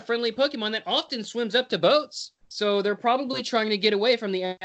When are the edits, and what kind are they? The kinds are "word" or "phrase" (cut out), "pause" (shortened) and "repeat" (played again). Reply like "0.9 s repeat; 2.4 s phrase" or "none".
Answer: 2.4 s pause